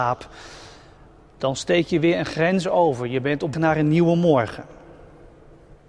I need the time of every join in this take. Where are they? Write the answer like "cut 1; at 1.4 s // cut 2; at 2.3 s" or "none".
cut 1; at 3.5 s